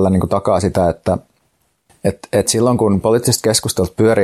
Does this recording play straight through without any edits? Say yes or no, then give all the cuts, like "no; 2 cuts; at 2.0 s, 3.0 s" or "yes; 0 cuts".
yes; 0 cuts